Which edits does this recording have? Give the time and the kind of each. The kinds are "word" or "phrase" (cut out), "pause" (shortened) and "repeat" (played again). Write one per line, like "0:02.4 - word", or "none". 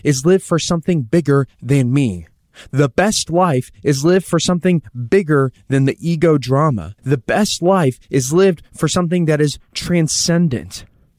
0:07.0 - pause